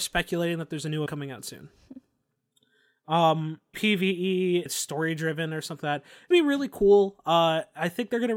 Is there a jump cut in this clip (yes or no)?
yes